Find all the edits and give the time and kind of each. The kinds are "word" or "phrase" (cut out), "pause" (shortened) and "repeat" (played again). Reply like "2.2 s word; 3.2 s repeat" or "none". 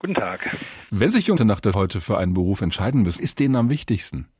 1.4 s word; 1.7 s word; 3.2 s word